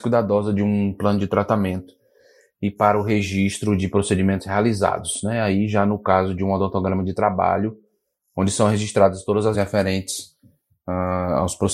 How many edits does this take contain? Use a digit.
1